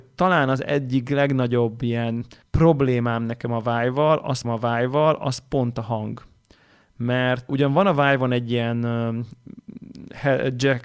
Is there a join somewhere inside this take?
yes; 3 cuts; at 2.4 s, 4.4 s, 7.5 s

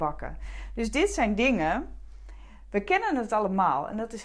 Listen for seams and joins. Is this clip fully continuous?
yes; 0 cuts

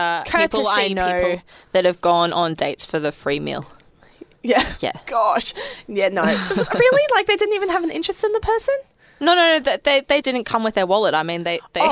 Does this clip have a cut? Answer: yes; 1 cut; at 10.2 s

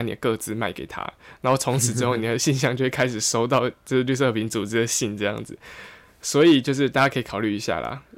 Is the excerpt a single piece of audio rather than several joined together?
yes; 0 cuts

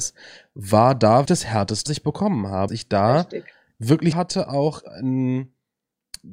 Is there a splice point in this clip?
yes; 4 cuts; at 1.3 s, 1.9 s, 2.7 s, 4.1 s

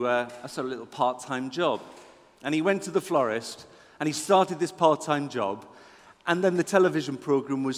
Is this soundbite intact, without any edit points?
yes; 0 cuts

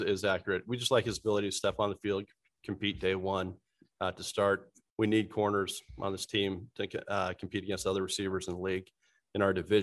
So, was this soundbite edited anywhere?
no; 0 cuts

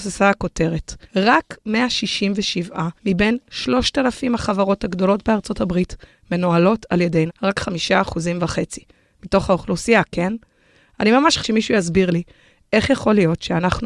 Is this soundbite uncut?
no; 4 cuts; at 1.0 s, 3.0 s, 7.3 s, 11.4 s

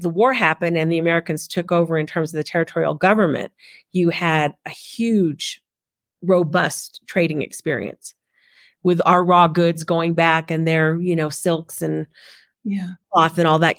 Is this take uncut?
yes; 0 cuts

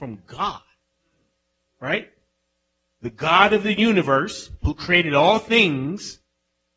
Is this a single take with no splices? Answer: no; 1 cut; at 4.6 s

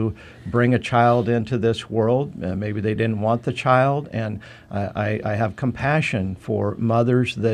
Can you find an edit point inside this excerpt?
no; 0 cuts

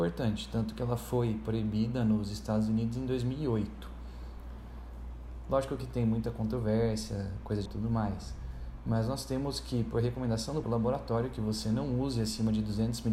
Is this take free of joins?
no; 2 cuts; at 7.7 s, 10.6 s

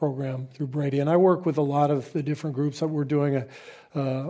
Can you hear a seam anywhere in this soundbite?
no; 0 cuts

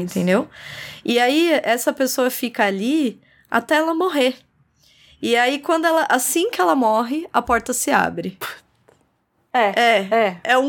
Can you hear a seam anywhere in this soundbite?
no; 0 cuts

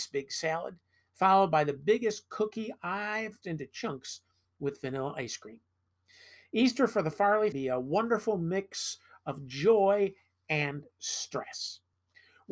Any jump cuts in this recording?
yes; 2 cuts; at 3.4 s, 7.5 s

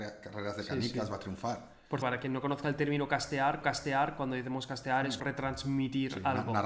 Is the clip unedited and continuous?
no; 3 cuts; at 2.0 s, 3.6 s, 5.2 s

